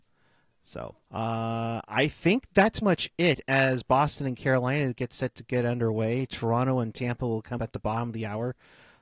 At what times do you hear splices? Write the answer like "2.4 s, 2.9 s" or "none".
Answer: 1.0 s, 2.8 s, 7.6 s